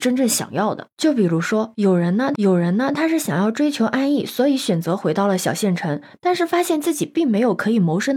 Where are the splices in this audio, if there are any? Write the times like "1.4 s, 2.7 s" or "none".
2.4 s